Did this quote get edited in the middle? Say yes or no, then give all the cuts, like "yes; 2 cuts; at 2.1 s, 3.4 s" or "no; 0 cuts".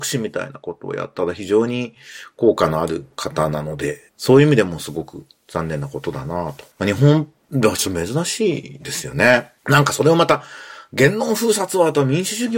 yes; 4 cuts; at 3.1 s, 4.1 s, 6.7 s, 9.6 s